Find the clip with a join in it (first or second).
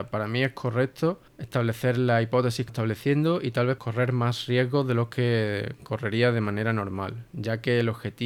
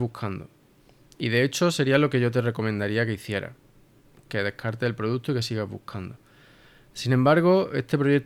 first